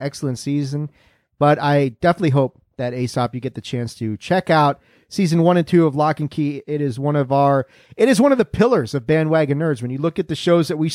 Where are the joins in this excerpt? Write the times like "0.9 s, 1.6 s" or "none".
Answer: none